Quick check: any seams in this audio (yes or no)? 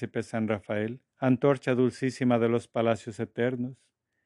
yes